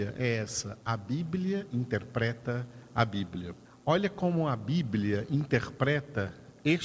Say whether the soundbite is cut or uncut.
cut